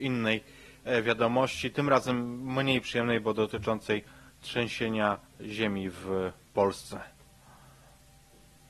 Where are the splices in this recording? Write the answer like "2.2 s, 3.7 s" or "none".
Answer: none